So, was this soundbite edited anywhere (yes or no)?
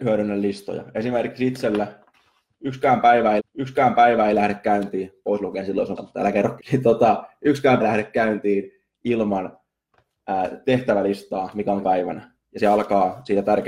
yes